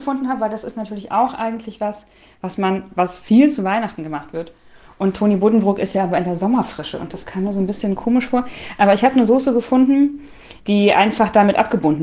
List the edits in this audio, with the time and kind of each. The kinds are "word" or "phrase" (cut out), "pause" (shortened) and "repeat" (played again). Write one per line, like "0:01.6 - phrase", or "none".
none